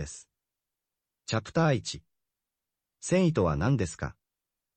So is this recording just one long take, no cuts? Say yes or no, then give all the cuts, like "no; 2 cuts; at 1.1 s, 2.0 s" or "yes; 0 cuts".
yes; 0 cuts